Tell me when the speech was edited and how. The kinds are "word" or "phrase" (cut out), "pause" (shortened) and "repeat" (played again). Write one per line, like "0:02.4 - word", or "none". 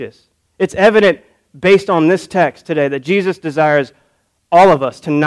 none